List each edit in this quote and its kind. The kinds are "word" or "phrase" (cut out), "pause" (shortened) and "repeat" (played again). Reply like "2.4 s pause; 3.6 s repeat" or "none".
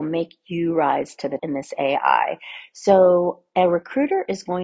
1.4 s word

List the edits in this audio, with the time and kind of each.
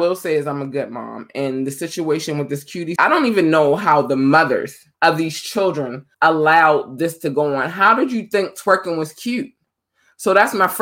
3.0 s word; 4.9 s pause; 6.1 s pause

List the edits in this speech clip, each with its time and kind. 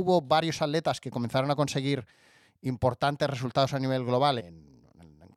4.4 s word

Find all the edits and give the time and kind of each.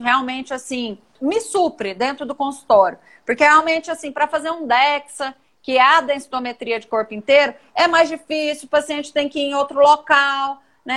none

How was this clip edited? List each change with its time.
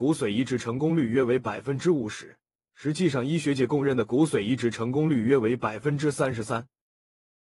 2.6 s pause

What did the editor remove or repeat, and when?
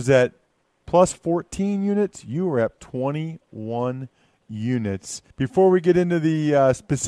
2.8 s word; 5.3 s pause

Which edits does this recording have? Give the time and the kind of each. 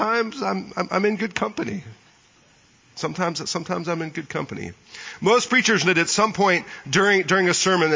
5.8 s word

